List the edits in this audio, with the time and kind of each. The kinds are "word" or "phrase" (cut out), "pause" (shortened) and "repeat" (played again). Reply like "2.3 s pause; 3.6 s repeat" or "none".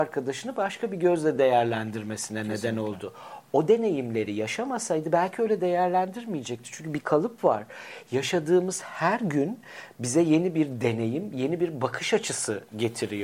none